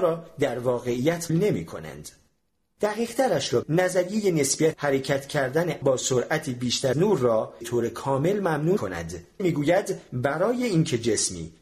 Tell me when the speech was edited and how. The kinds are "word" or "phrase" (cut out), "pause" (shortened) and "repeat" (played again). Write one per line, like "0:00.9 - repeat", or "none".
0:01.3 - word
0:03.6 - word
0:04.7 - word
0:05.8 - word
0:06.9 - word
0:07.6 - word
0:08.8 - word
0:09.4 - word